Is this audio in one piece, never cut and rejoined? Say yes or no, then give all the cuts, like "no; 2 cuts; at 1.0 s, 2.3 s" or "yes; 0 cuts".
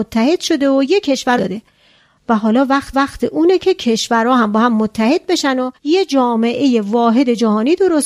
no; 3 cuts; at 1.4 s, 2.9 s, 5.7 s